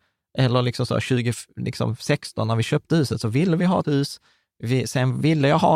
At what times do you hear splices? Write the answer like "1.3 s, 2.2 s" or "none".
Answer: 3.8 s